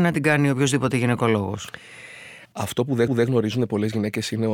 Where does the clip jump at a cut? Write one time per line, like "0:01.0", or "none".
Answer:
0:02.4
0:03.1

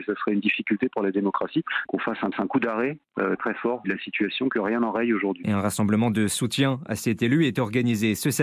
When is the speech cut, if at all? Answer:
0:02.3
0:03.4
0:03.8

